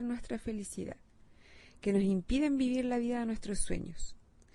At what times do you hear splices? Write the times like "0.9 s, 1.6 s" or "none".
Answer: none